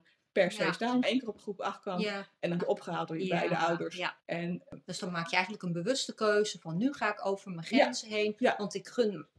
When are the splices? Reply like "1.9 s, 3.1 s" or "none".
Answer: 1.0 s, 2.6 s, 4.2 s